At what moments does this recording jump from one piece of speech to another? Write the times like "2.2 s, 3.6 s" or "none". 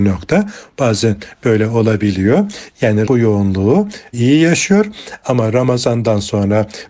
3.1 s